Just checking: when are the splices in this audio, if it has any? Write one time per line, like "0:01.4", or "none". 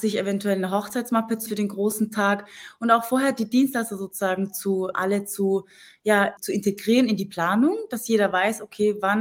0:01.5
0:04.9
0:06.4

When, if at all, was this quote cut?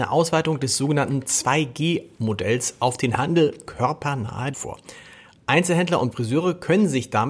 0:03.7
0:04.5
0:06.1

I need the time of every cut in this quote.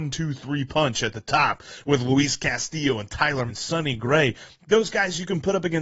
0:03.5

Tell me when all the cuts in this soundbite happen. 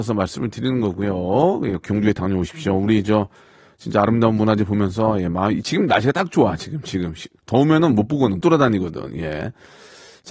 0:01.8
0:08.4

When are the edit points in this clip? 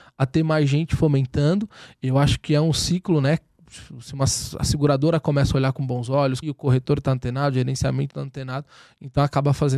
0:06.4
0:08.1

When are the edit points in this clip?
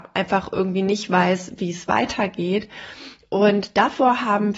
none

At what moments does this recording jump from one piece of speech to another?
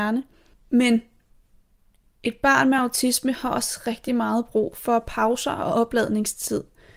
none

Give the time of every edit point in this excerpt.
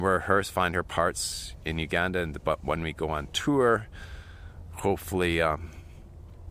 none

